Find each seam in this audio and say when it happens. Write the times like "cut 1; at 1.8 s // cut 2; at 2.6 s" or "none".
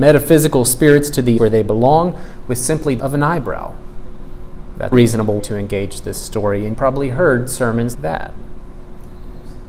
cut 1; at 1.4 s // cut 2; at 3.0 s // cut 3; at 4.9 s // cut 4; at 5.4 s // cut 5; at 6.7 s // cut 6; at 7.9 s